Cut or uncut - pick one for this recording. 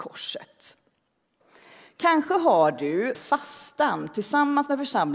cut